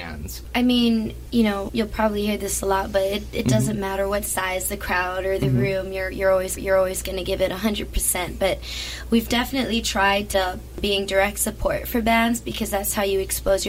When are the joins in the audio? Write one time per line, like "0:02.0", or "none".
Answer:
0:06.6
0:10.3